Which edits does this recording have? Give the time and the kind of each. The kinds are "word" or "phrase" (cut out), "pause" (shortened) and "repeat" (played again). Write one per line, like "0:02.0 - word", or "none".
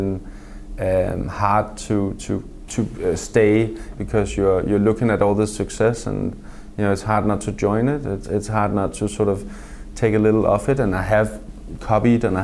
0:02.7 - word
0:03.9 - word
0:08.2 - word